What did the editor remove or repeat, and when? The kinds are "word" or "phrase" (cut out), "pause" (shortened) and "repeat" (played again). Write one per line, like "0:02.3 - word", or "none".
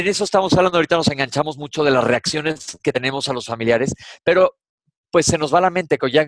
none